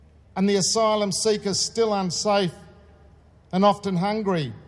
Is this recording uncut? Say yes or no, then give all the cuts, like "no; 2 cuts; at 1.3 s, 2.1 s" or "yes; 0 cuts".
yes; 0 cuts